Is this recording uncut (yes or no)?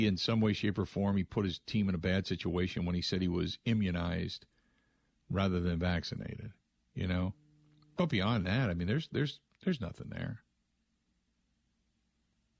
yes